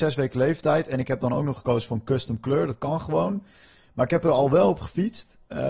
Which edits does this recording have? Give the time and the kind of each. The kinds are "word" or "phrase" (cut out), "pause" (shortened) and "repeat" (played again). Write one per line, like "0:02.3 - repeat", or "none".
none